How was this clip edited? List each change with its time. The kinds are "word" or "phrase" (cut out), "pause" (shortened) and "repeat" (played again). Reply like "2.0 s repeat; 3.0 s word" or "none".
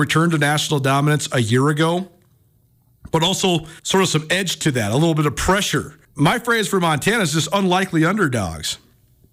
3.8 s pause; 6.0 s pause